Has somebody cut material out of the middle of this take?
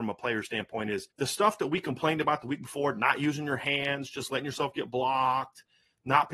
yes; 1 cut; at 1.1 s

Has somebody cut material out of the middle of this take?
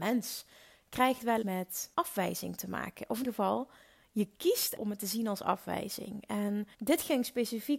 yes; 5 cuts; at 1.4 s, 1.9 s, 3.2 s, 4.8 s, 6.7 s

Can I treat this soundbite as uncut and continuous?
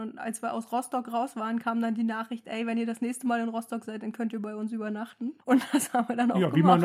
no; 1 cut; at 5.4 s

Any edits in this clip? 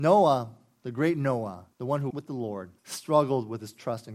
yes; 3 cuts; at 1.7 s, 2.1 s, 2.8 s

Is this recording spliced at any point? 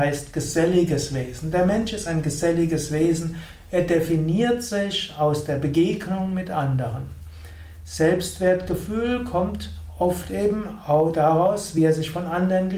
no; 0 cuts

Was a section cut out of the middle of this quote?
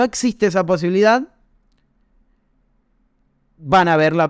no; 0 cuts

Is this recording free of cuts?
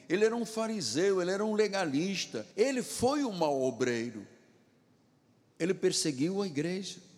no; 1 cut; at 2.5 s

